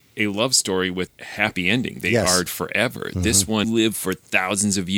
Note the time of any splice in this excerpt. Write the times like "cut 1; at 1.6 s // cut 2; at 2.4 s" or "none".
cut 1; at 1.1 s // cut 2; at 2.5 s // cut 3; at 3.6 s

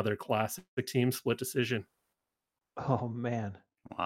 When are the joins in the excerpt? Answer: none

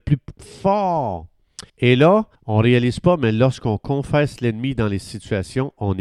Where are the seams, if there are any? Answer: cut 1; at 1.7 s // cut 2; at 2.3 s

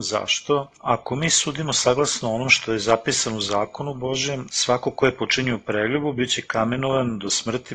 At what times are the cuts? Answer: none

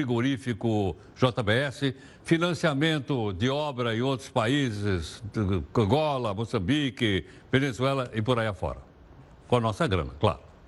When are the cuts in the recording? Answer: none

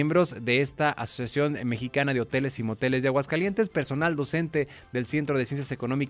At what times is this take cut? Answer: none

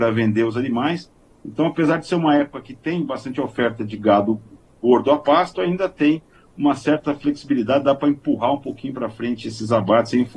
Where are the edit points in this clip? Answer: none

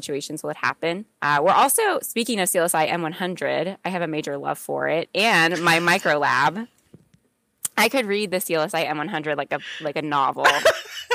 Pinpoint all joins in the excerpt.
none

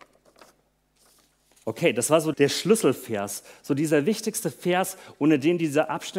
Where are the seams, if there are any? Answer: cut 1; at 2.3 s

